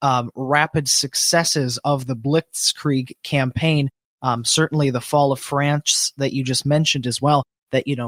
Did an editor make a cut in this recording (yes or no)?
no